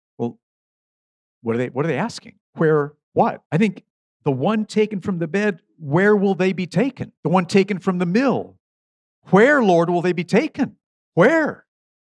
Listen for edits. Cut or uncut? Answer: cut